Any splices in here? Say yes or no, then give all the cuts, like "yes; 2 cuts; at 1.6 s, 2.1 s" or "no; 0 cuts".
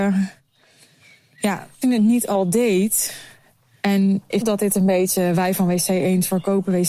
yes; 2 cuts; at 1.8 s, 4.4 s